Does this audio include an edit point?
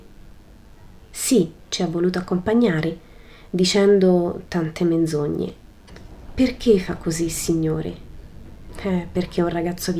no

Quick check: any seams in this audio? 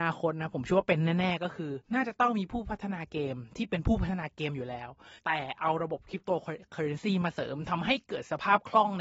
yes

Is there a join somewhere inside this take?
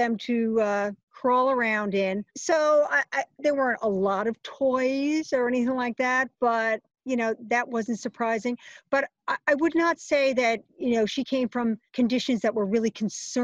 yes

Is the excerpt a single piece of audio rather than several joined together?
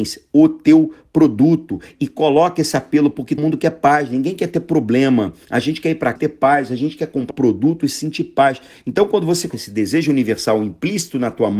no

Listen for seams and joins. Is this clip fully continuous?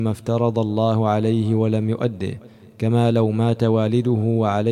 yes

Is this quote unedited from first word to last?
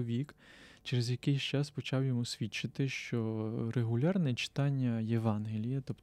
yes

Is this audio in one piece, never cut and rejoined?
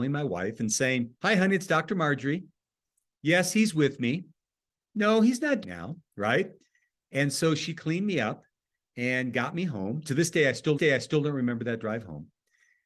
no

